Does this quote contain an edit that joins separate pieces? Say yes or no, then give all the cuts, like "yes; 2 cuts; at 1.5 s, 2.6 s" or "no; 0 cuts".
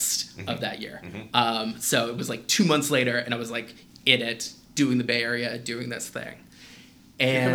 no; 0 cuts